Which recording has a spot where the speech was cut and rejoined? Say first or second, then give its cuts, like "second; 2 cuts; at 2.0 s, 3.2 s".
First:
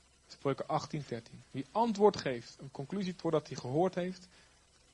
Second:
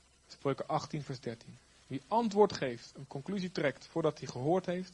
first; 3 cuts; at 1.1 s, 1.5 s, 3.2 s